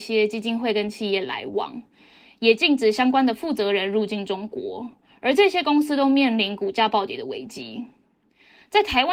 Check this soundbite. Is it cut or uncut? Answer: uncut